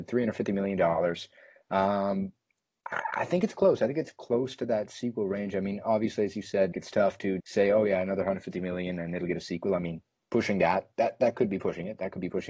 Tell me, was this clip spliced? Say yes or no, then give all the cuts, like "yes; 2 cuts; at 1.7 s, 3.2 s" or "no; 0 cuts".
yes; 2 cuts; at 6.7 s, 7.4 s